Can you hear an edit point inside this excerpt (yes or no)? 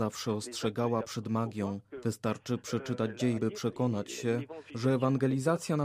yes